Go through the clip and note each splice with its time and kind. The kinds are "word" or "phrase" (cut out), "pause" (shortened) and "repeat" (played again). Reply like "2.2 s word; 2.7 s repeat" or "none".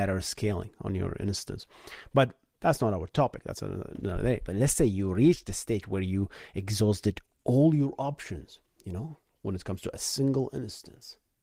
none

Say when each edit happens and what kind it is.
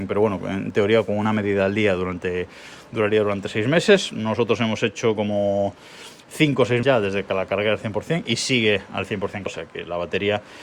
6.8 s word; 9.5 s word

